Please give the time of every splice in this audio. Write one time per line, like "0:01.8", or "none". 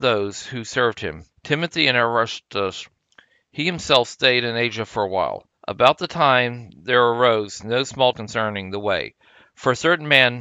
0:01.3
0:05.6
0:08.1